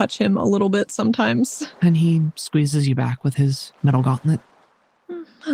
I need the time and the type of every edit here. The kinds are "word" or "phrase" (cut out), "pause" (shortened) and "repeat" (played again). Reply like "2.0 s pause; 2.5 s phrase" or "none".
1.7 s pause; 3.8 s pause